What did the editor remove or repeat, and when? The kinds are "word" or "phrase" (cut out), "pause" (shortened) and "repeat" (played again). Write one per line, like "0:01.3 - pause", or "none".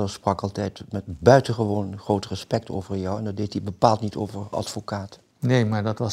0:04.5 - word